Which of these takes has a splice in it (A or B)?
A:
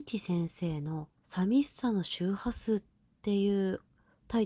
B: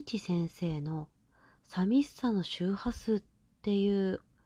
A